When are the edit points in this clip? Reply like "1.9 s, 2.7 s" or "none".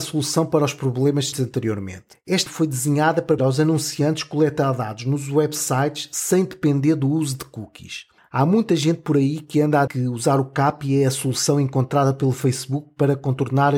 1.3 s, 2.5 s, 3.4 s, 9.9 s

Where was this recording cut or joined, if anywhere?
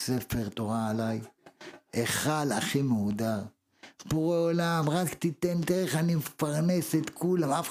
none

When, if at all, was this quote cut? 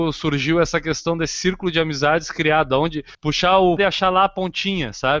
3.1 s, 3.8 s

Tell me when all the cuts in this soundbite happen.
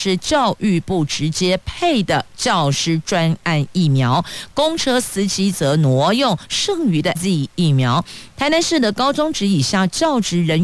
7.1 s

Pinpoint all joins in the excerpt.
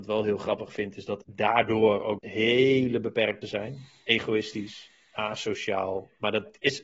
1.2 s, 2.2 s, 3.4 s

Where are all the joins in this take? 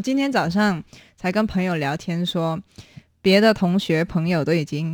none

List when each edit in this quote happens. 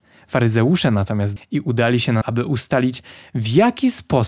1.4 s, 2.2 s

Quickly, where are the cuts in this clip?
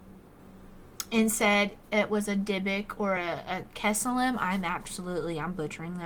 none

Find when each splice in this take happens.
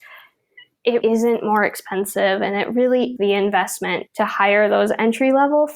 1.0 s, 3.2 s

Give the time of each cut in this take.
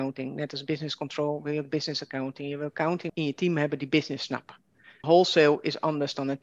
3.1 s, 5.0 s

